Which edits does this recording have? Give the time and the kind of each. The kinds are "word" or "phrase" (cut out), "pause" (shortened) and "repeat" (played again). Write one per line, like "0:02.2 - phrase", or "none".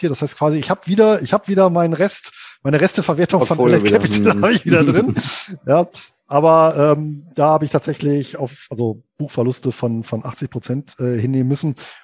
0:09.1 - pause